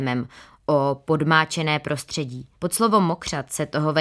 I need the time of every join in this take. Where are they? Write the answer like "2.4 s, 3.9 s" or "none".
2.5 s